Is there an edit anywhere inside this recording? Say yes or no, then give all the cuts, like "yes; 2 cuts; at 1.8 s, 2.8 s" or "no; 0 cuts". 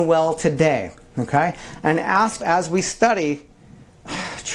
yes; 1 cut; at 2.4 s